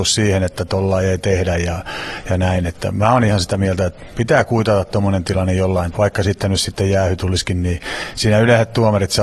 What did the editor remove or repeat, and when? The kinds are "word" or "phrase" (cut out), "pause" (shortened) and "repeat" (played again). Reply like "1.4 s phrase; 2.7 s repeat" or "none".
4.1 s word; 5.9 s word